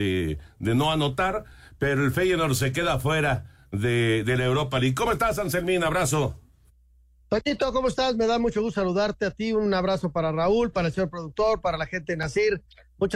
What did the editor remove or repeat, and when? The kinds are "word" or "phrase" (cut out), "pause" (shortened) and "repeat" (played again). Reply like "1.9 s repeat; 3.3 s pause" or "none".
none